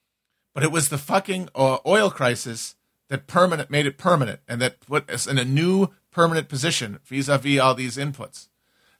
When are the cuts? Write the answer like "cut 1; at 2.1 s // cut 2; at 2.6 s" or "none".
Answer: none